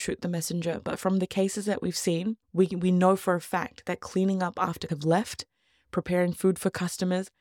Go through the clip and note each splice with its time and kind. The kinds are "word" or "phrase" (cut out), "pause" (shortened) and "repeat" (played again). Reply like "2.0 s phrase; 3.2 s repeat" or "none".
2.4 s pause; 4.9 s word